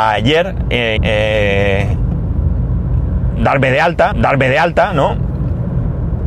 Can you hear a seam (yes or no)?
yes